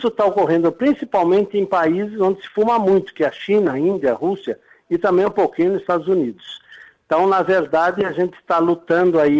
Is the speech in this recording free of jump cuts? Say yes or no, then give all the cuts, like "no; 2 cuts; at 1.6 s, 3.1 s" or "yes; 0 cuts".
yes; 0 cuts